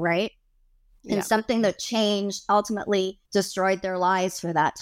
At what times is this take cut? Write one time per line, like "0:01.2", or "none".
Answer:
0:03.2